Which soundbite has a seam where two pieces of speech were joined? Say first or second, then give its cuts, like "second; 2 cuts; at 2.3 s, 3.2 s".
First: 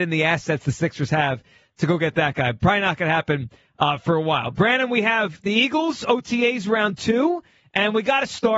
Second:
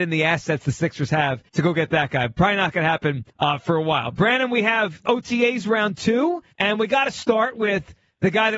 second; 4 cuts; at 1.5 s, 3.3 s, 5.1 s, 6.5 s